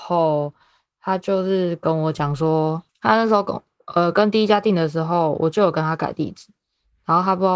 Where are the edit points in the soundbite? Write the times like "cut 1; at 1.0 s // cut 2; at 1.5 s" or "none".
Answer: cut 1; at 2.9 s